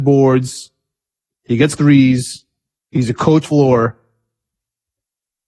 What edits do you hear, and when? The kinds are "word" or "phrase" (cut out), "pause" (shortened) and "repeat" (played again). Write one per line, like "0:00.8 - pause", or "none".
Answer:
0:01.7 - word
0:02.8 - pause
0:03.4 - phrase